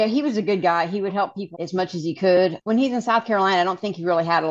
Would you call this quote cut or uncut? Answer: cut